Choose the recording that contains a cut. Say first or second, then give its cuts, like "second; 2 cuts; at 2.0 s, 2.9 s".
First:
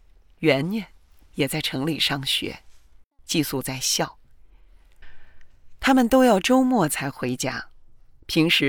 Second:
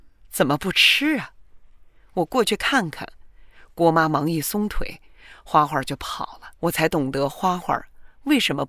second; 1 cut; at 6.6 s